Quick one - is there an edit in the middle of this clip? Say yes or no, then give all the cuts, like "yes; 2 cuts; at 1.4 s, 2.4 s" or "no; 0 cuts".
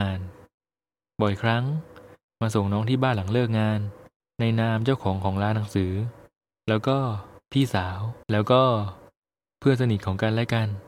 yes; 2 cuts; at 4.2 s, 8.2 s